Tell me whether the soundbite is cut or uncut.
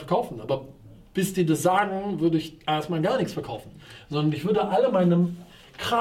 uncut